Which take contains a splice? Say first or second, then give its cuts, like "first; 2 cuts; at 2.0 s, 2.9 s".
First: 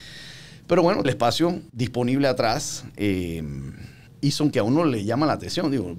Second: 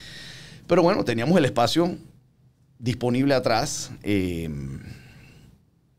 first; 4 cuts; at 1.0 s, 1.7 s, 4.1 s, 4.5 s